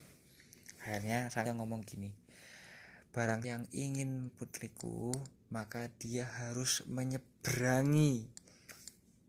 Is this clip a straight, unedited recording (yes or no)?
no